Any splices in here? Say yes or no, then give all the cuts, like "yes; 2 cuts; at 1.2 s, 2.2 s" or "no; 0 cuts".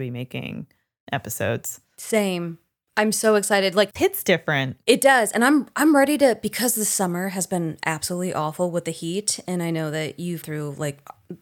yes; 2 cuts; at 4.0 s, 10.4 s